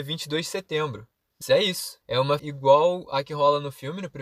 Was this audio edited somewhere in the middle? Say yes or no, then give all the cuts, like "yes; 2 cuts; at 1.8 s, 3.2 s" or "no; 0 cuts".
yes; 3 cuts; at 1.4 s, 2.0 s, 2.4 s